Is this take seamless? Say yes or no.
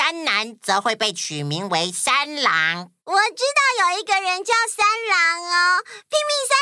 no